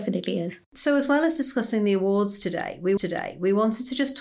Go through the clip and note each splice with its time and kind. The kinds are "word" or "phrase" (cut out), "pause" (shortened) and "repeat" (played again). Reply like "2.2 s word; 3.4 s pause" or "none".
3.0 s repeat